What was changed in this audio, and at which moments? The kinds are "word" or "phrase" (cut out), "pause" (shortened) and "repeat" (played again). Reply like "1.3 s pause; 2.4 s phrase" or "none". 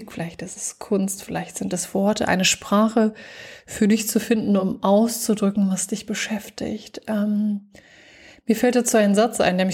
none

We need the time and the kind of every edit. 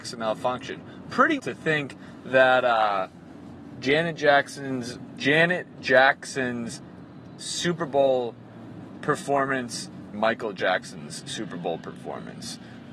1.4 s word; 7.4 s word; 10.1 s phrase

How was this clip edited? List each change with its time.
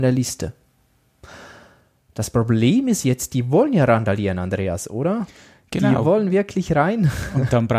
none

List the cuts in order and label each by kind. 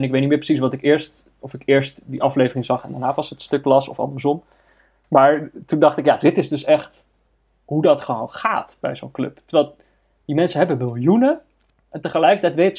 none

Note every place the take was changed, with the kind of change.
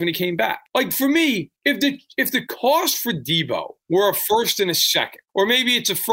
none

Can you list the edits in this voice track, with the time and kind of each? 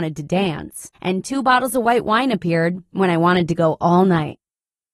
0.9 s pause

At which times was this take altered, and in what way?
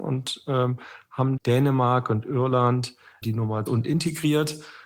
1.4 s phrase; 3.2 s word; 3.7 s phrase

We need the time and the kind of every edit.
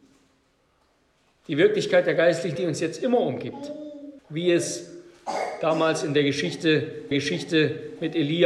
2.6 s word; 4.2 s pause; 7.1 s repeat

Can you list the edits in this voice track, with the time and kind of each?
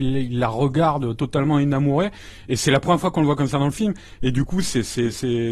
none

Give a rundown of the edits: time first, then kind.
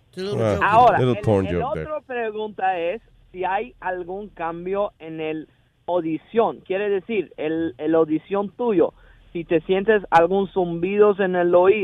none

